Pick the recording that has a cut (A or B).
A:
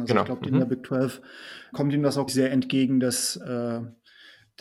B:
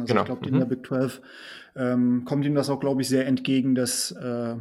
A